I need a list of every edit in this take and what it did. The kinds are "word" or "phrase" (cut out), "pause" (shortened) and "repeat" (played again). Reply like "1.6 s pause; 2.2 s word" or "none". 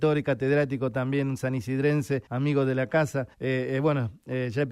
2.3 s pause; 3.3 s pause

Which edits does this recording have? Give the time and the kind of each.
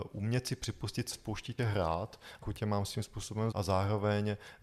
1.1 s word; 1.6 s word; 2.4 s phrase; 3.5 s word

